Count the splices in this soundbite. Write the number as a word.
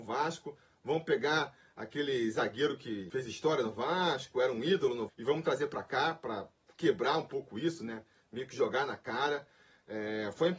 one